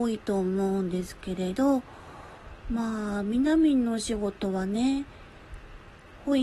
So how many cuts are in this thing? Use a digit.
1